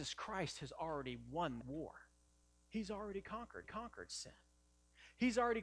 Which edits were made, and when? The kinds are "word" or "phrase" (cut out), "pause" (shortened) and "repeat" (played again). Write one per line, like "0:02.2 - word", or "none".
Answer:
0:01.6 - word
0:02.3 - pause
0:03.6 - repeat